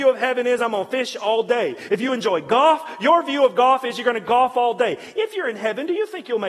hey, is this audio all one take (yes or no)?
yes